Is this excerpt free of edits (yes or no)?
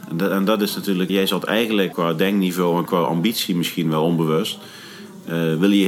no